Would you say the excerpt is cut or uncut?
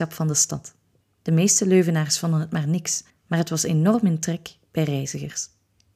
cut